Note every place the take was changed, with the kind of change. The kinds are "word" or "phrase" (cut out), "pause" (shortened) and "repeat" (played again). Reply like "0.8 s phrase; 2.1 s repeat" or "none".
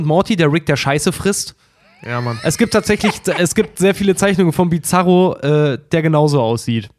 none